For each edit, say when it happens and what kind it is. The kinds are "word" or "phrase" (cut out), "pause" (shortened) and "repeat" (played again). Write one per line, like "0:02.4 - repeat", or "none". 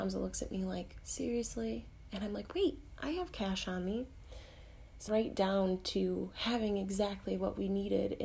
0:05.1 - word